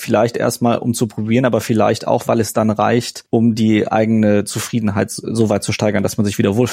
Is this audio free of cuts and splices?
no; 1 cut; at 3.3 s

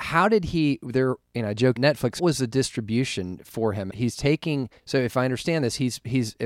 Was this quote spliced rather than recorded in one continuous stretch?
yes; 4 cuts; at 1.8 s, 2.2 s, 3.9 s, 4.8 s

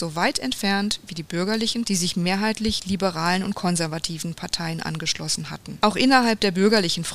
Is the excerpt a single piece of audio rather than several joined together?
no; 1 cut; at 1.8 s

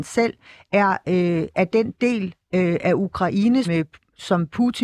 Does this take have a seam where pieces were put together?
yes; 1 cut; at 3.6 s

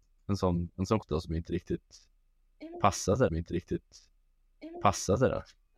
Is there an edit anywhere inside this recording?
yes; 2 cuts; at 1.0 s, 3.3 s

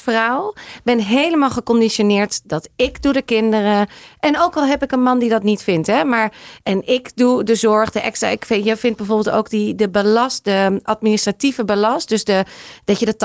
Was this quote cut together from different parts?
no; 0 cuts

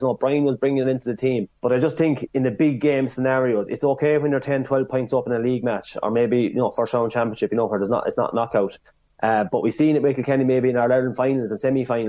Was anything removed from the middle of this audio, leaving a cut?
yes; 1 cut; at 1.6 s

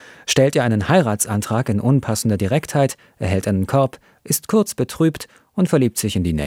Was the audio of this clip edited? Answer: no; 0 cuts

